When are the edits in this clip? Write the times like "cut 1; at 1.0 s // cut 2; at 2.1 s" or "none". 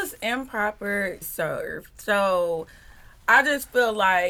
cut 1; at 1.2 s